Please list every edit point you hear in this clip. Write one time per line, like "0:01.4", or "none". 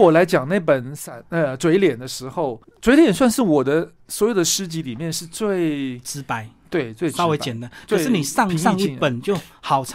0:02.6